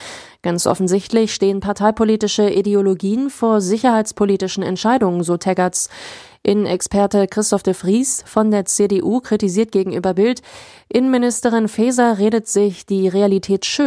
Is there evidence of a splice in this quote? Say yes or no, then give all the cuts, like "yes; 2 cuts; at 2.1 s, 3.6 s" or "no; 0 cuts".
no; 0 cuts